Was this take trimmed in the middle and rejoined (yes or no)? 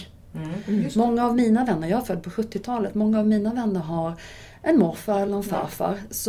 no